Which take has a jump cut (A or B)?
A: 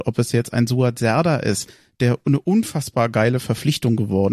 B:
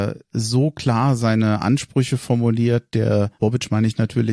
B